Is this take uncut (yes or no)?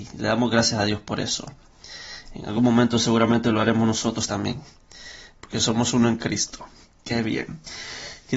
yes